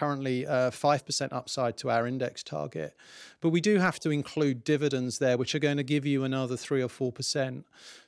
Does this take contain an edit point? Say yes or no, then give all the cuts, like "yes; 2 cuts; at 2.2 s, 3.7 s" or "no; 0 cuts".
no; 0 cuts